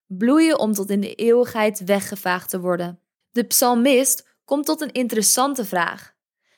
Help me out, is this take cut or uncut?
uncut